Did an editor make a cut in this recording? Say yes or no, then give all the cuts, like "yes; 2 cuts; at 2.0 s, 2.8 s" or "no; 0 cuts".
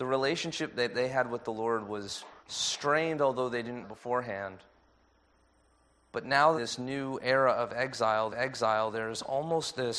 yes; 4 cuts; at 2.4 s, 3.8 s, 6.6 s, 8.3 s